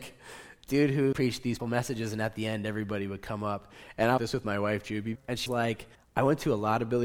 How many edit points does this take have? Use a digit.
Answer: 6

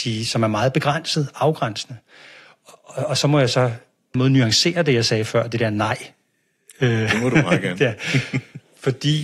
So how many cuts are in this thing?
1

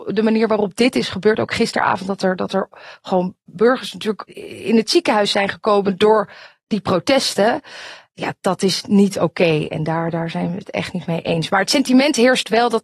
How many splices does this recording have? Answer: 0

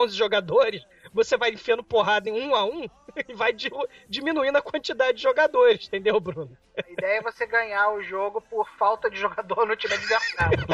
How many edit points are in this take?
0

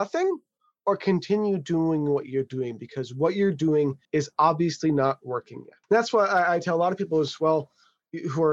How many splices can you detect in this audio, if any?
2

